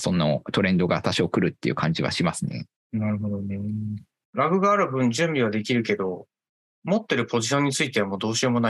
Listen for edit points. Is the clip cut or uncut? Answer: uncut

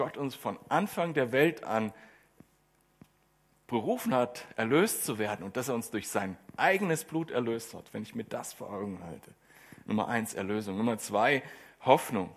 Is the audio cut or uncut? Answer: uncut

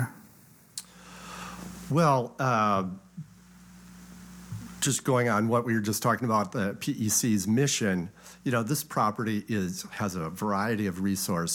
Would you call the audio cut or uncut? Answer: uncut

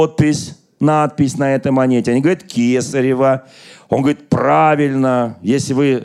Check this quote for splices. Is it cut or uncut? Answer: uncut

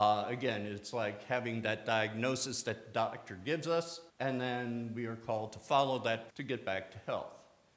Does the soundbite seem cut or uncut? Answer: cut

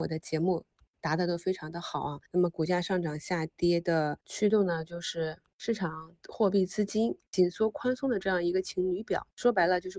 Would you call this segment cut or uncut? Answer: cut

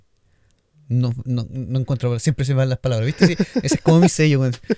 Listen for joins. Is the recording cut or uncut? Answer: uncut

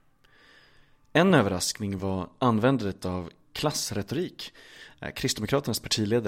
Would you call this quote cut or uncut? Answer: uncut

